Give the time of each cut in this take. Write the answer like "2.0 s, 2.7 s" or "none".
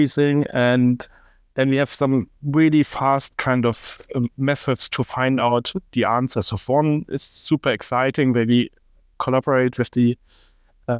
none